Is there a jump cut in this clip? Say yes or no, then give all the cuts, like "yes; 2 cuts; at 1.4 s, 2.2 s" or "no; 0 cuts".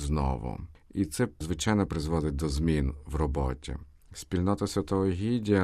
no; 0 cuts